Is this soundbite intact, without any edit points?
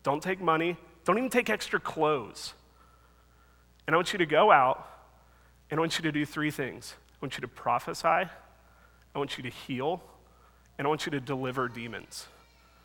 yes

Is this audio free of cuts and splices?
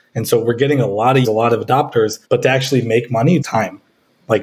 no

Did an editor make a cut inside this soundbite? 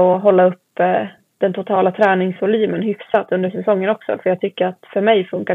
no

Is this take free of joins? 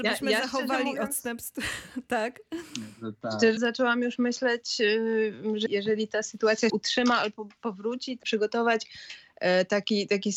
no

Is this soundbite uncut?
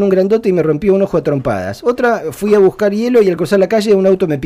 yes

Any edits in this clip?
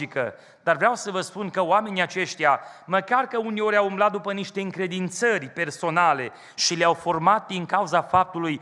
no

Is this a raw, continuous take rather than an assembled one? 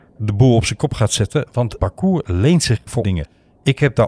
no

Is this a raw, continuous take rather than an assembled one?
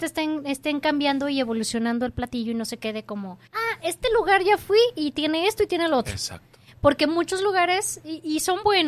no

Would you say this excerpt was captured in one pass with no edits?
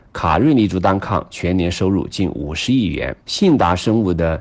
no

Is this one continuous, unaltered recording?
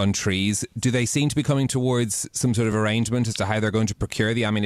yes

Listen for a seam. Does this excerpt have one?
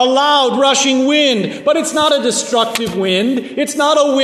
no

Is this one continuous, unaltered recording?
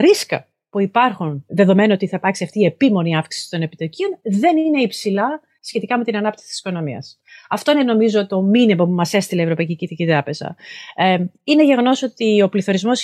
yes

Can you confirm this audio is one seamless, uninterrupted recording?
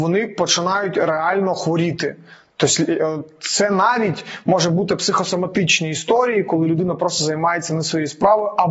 yes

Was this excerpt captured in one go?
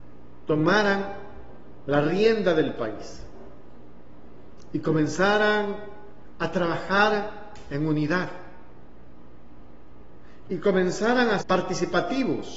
no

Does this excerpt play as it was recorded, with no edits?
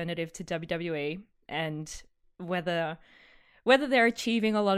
yes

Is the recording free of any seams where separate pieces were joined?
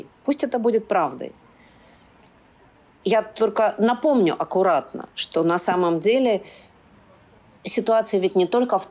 yes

